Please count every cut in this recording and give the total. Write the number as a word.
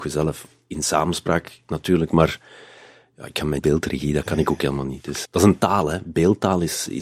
two